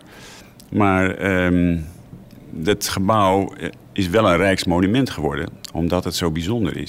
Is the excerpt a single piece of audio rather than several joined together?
yes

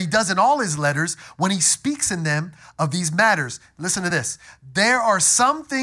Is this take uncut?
yes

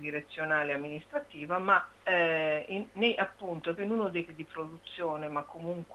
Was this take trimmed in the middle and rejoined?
yes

